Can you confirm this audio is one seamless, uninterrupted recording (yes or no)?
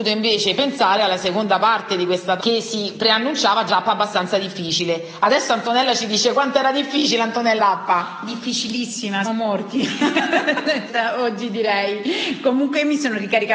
no